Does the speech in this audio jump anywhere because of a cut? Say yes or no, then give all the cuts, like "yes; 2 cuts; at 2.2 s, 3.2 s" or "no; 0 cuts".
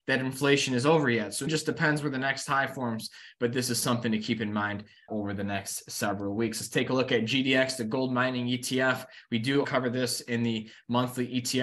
yes; 3 cuts; at 1.5 s, 5.1 s, 9.6 s